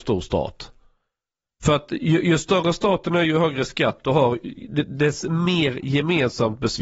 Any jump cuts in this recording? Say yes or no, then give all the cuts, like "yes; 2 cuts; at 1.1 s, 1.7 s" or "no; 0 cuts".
no; 0 cuts